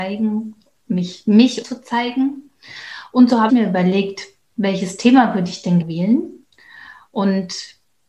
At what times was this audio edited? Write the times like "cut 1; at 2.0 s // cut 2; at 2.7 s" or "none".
cut 1; at 1.6 s // cut 2; at 3.5 s // cut 3; at 5.8 s